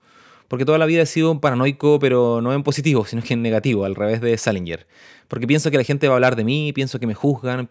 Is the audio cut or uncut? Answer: uncut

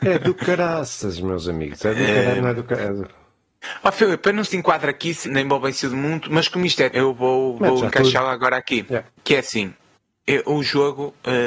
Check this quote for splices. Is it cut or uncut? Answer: cut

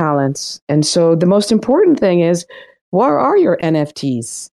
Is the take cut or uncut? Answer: uncut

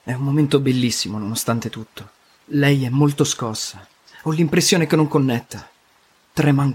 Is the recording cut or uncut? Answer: uncut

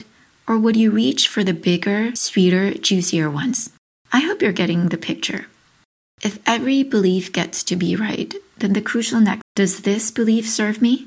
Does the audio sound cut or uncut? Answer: cut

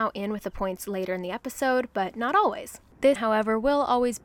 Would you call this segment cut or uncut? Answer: cut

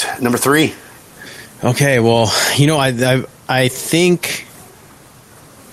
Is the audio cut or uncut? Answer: uncut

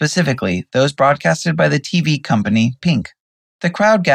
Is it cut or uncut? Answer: uncut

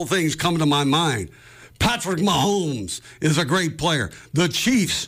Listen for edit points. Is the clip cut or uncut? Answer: uncut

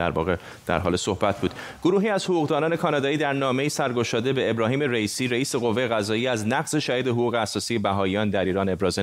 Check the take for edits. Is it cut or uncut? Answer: uncut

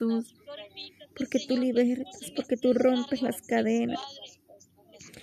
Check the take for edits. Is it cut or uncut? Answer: uncut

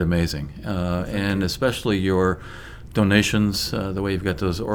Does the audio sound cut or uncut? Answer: uncut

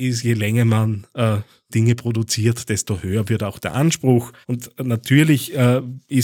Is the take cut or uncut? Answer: cut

